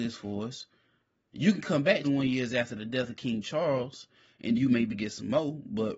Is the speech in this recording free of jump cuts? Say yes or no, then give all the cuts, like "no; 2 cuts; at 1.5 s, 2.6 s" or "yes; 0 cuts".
no; 3 cuts; at 2.0 s, 4.5 s, 4.9 s